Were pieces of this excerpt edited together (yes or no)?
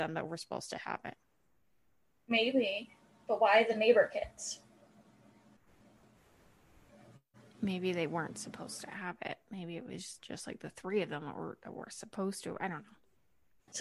no